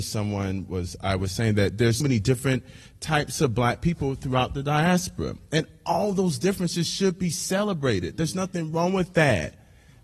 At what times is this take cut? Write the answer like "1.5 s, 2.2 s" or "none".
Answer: 2.0 s